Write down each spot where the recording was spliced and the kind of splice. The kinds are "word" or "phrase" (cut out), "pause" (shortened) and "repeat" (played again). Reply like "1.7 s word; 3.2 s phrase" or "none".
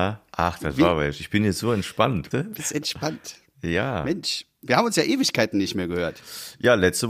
2.3 s word

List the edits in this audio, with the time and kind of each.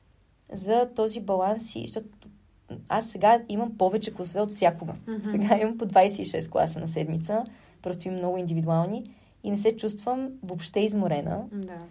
none

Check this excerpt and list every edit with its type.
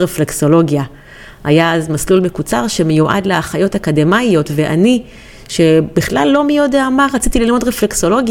none

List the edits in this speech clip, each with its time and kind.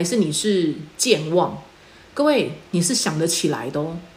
1.7 s pause; 2.7 s phrase

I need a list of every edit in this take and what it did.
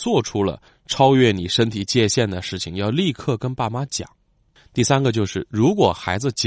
none

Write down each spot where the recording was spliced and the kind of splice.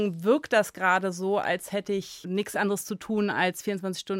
none

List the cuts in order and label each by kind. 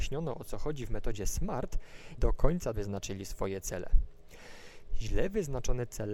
2.2 s word; 2.7 s word

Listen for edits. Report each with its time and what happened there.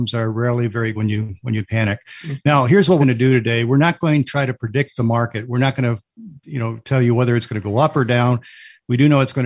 0.9 s word; 3.0 s phrase; 4.3 s word

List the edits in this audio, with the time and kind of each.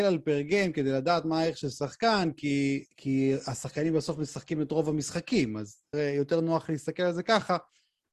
2.9 s pause; 5.9 s word

